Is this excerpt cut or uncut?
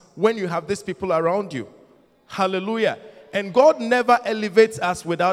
uncut